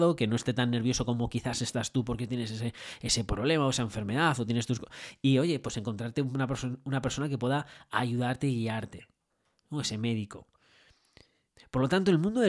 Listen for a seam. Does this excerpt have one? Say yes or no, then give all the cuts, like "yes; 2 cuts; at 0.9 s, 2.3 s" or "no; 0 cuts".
no; 0 cuts